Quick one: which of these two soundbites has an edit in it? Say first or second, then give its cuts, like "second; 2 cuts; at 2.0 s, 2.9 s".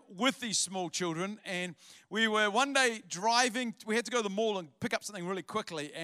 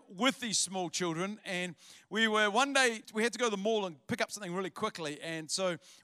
second; 1 cut; at 3.0 s